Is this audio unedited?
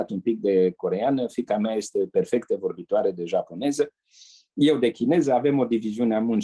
yes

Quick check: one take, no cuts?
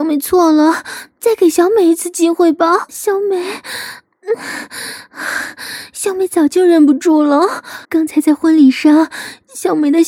no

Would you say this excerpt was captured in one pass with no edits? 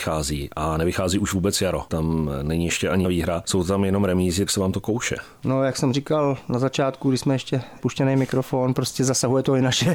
no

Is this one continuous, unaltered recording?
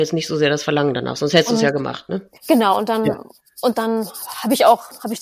no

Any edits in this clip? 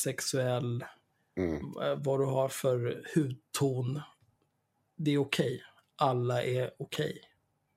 no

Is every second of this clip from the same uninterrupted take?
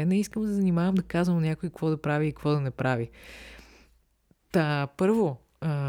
yes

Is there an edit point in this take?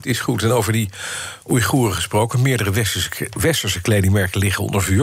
no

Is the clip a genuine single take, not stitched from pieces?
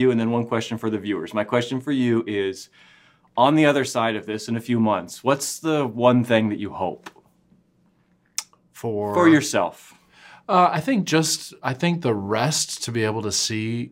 yes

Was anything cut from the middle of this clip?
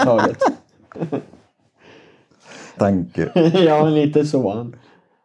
yes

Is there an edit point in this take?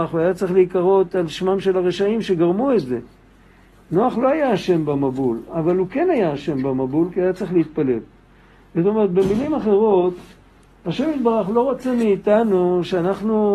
no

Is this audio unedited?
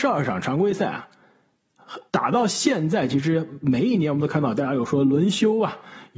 no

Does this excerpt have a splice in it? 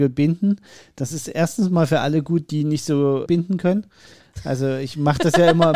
yes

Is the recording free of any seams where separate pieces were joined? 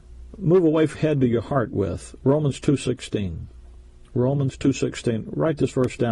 no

